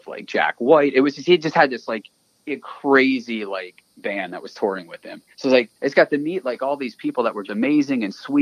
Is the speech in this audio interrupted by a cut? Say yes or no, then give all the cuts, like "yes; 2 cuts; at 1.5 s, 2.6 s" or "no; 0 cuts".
yes; 4 cuts; at 3.9 s, 5.3 s, 5.8 s, 7.5 s